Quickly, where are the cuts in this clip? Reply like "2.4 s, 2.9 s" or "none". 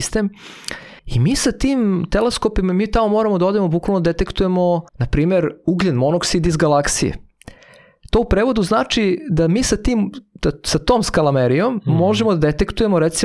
1.0 s, 4.9 s

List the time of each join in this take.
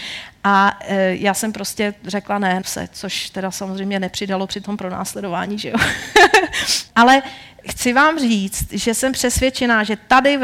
2.6 s, 6.9 s, 7.6 s

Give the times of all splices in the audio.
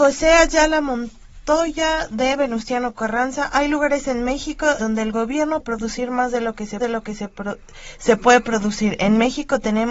4.8 s, 5.6 s, 6.8 s

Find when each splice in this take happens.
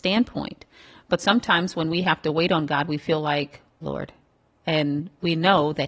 3.8 s

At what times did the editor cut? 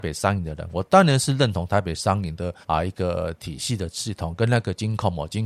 2.6 s

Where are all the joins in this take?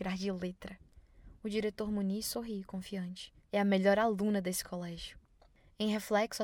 3.4 s

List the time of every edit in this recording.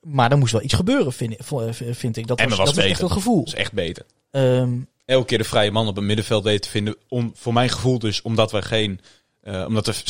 none

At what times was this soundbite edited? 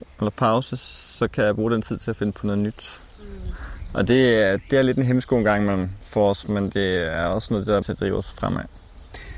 7.8 s

